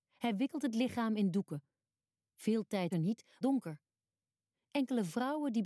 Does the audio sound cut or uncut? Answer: cut